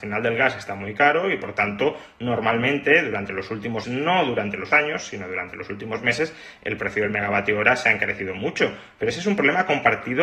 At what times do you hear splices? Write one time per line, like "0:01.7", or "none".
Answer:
0:03.8
0:04.7